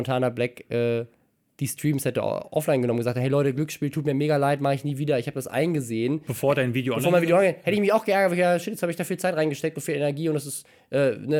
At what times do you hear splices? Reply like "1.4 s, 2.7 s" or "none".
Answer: none